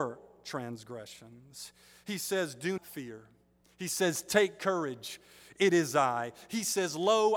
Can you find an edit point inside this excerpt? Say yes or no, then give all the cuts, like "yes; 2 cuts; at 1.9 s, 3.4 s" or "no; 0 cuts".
yes; 1 cut; at 2.8 s